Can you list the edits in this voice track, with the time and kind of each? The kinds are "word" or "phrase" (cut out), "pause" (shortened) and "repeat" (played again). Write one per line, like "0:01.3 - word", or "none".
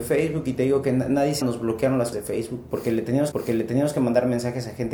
0:01.4 - word
0:02.1 - word
0:03.3 - repeat